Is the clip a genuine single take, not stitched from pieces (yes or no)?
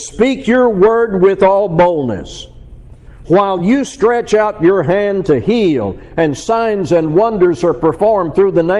yes